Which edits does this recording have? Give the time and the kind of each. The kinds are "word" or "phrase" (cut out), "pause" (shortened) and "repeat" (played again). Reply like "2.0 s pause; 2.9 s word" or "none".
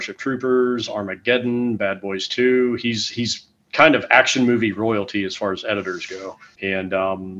none